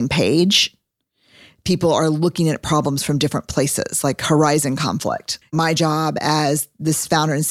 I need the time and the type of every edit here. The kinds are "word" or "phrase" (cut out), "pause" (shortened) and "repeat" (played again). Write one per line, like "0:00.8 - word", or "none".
0:05.4 - word